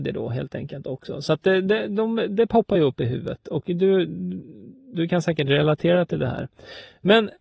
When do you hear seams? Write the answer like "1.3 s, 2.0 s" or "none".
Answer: none